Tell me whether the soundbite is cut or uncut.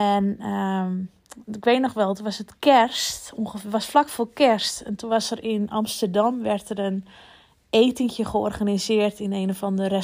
uncut